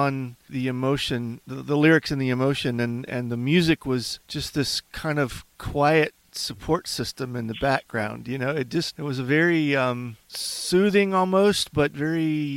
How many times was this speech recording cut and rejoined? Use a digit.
2